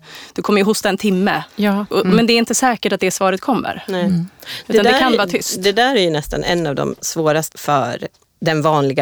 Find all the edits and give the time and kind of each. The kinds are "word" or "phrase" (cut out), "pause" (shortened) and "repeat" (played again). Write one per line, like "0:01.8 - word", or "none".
0:01.5 - pause
0:07.5 - word